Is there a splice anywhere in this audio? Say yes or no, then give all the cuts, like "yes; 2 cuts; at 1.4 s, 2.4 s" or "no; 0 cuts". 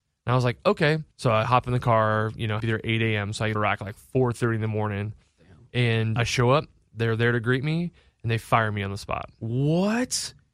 yes; 4 cuts; at 1.1 s, 2.6 s, 3.5 s, 6.2 s